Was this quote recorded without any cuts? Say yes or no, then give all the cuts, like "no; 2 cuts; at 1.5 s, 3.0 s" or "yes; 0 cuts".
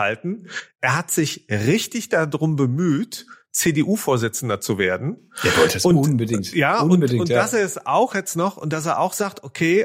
yes; 0 cuts